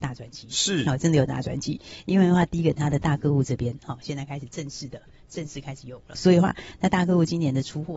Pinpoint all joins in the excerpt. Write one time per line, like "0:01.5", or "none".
0:06.1